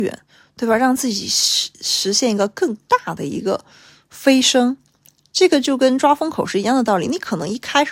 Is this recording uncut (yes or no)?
yes